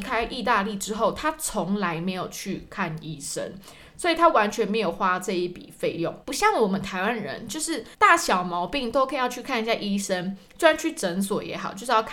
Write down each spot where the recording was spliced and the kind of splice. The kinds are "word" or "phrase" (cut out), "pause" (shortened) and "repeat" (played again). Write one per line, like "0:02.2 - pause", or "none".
0:06.2 - pause
0:07.9 - pause